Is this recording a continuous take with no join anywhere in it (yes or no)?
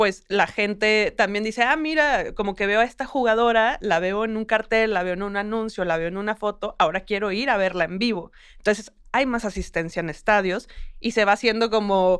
yes